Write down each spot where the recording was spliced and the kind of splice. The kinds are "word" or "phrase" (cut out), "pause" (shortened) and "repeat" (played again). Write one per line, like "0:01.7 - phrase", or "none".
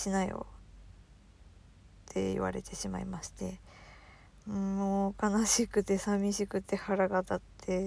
none